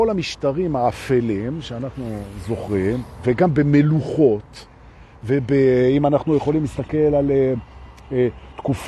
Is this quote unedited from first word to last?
yes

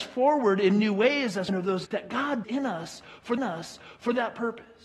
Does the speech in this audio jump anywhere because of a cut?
yes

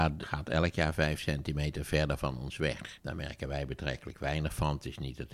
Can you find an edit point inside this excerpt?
no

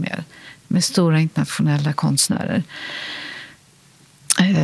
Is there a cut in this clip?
no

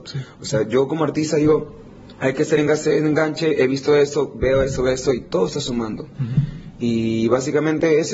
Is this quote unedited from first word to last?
yes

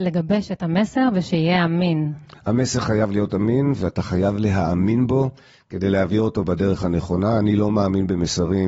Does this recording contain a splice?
no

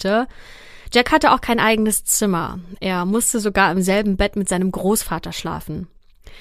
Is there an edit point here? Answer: no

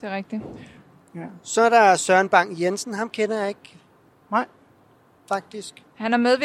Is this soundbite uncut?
yes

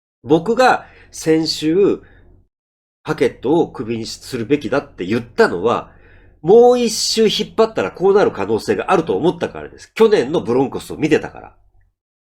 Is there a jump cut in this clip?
no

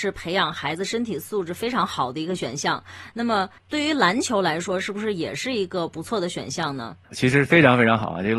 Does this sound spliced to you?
yes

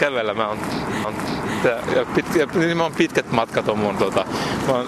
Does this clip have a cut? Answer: yes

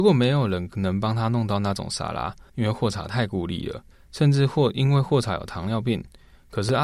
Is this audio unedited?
no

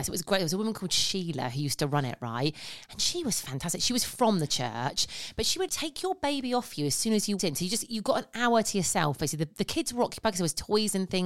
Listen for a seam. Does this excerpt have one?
yes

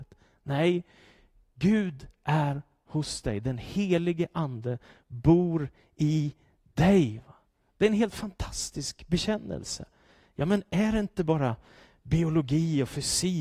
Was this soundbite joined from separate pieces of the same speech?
no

